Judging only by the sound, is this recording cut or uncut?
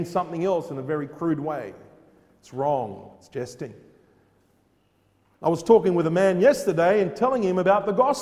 cut